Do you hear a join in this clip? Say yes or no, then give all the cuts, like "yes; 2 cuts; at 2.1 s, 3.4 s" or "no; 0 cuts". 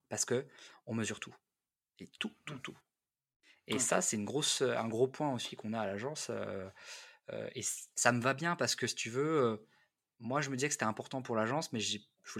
yes; 1 cut; at 7.9 s